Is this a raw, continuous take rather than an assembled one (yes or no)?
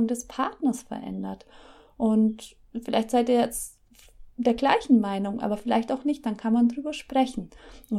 no